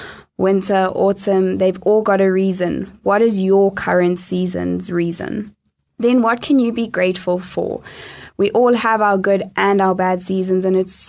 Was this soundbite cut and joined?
no; 0 cuts

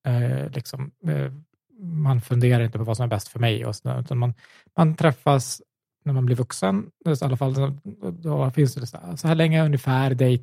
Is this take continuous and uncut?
yes; 0 cuts

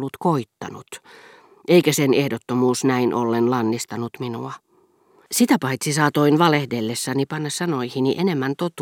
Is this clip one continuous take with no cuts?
yes; 0 cuts

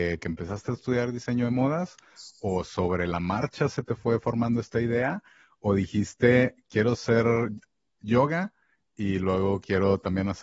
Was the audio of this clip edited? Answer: no; 0 cuts

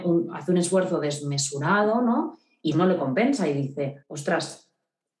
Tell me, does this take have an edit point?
yes; 2 cuts; at 2.7 s, 4.0 s

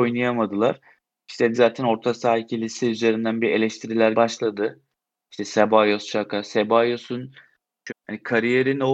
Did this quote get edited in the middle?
yes; 3 cuts; at 1.5 s, 4.1 s, 7.9 s

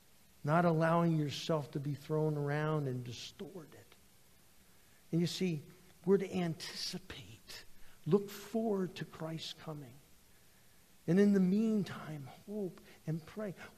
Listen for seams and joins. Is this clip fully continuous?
yes; 0 cuts

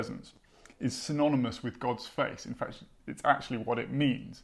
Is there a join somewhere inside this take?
no; 0 cuts

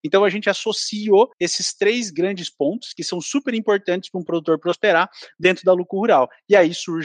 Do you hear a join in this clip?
yes; 1 cut; at 1.3 s

